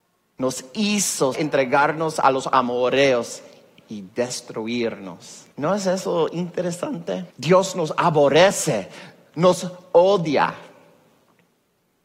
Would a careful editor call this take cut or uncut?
cut